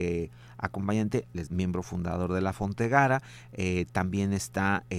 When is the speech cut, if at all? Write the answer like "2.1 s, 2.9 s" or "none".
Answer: 1.5 s